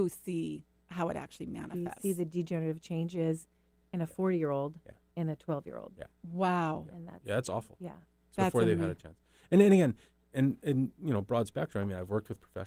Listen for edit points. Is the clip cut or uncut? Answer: uncut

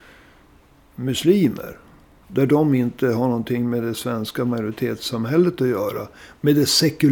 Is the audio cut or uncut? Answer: uncut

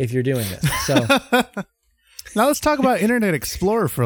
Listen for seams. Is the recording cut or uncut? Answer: uncut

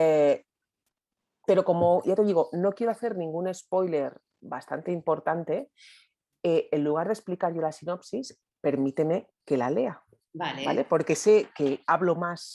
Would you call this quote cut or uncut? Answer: uncut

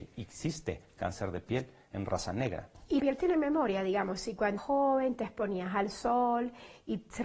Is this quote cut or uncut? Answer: cut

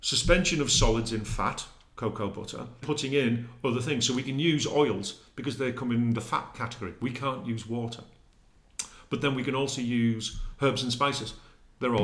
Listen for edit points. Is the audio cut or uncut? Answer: cut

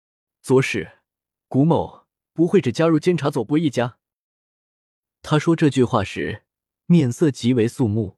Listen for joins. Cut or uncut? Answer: uncut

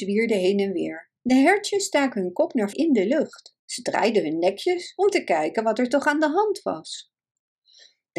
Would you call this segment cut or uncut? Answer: cut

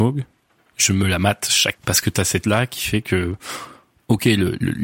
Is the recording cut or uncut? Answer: cut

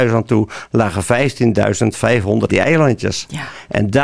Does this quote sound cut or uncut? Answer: cut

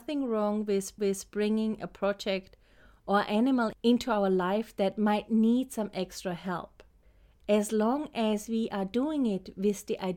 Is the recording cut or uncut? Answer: cut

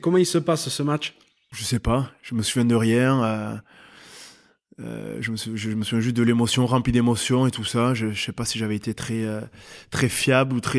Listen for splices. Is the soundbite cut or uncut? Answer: uncut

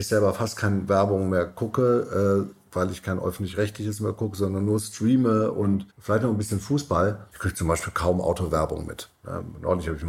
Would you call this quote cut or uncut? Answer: cut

